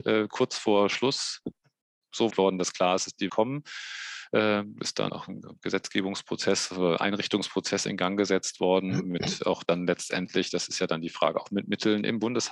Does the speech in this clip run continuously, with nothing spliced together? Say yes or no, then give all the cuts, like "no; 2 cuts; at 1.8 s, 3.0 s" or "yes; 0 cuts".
no; 3 cuts; at 2.3 s, 3.3 s, 5.1 s